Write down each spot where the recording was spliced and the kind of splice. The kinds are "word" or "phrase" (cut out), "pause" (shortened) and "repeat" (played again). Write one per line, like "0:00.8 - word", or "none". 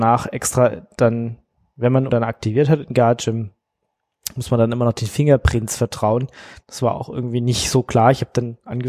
0:02.1 - word